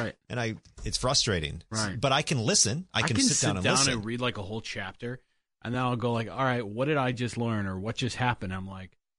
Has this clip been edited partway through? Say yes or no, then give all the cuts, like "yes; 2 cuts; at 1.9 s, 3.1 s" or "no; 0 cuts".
no; 0 cuts